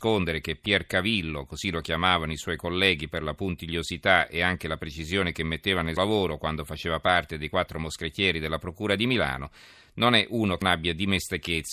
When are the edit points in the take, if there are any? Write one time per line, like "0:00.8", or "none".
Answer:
0:06.0
0:10.6